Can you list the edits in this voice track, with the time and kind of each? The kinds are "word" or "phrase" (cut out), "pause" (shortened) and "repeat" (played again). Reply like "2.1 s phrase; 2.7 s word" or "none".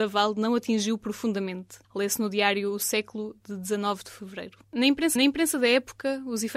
1.8 s pause; 4.6 s pause; 5.2 s repeat